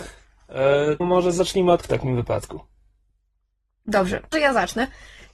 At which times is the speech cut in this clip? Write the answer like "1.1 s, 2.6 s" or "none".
1.0 s, 1.8 s, 4.3 s